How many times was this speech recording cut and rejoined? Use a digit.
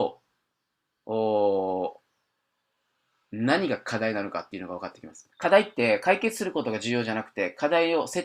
1